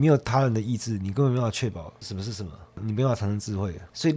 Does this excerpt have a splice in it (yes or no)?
no